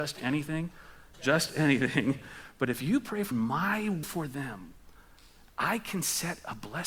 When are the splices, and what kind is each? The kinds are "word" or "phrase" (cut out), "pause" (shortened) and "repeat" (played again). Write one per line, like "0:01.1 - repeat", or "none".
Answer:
0:01.1 - word
0:03.3 - word
0:04.0 - word